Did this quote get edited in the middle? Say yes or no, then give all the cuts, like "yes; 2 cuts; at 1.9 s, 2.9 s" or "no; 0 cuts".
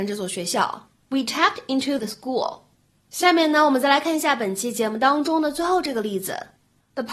yes; 2 cuts; at 0.9 s, 2.0 s